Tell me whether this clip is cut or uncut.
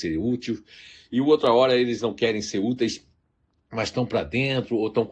uncut